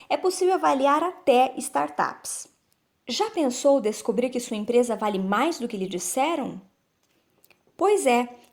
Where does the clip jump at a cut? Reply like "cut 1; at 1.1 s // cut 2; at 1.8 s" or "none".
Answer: none